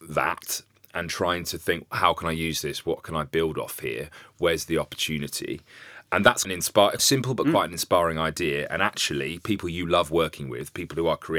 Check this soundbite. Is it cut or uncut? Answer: cut